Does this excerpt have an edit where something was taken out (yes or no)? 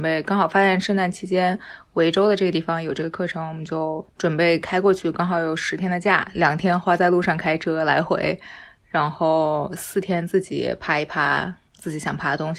yes